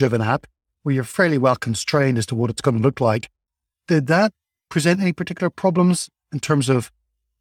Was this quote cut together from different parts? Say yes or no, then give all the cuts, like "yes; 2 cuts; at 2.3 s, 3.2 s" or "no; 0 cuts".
no; 0 cuts